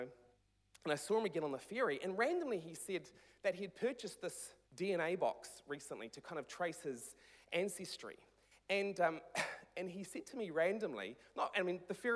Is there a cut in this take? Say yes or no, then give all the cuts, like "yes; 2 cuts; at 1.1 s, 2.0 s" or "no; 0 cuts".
yes; 1 cut; at 4.6 s